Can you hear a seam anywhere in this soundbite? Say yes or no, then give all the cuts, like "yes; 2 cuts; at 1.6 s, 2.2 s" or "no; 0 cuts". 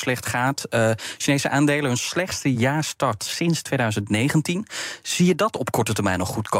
no; 0 cuts